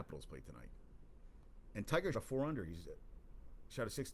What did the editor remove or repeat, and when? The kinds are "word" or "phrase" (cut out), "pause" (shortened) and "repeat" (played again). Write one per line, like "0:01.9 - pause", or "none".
0:02.1 - word